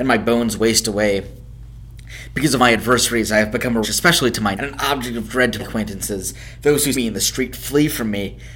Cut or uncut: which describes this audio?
cut